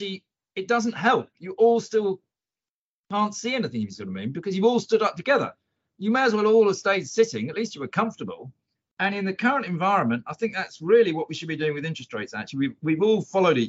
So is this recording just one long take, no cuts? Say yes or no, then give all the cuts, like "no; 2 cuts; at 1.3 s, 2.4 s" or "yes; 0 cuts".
yes; 0 cuts